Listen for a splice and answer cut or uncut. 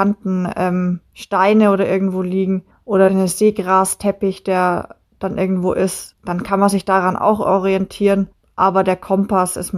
uncut